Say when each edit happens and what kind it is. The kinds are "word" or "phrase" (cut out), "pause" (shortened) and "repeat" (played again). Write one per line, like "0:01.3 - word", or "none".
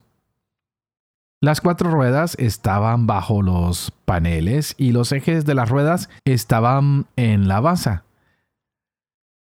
0:06.2 - pause